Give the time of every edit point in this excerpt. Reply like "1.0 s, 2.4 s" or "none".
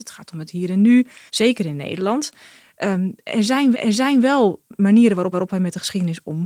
1.3 s, 3.7 s, 5.3 s